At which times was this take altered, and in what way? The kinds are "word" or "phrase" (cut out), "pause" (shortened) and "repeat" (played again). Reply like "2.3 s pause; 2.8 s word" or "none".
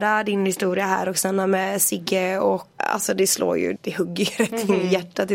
2.8 s word; 3.8 s word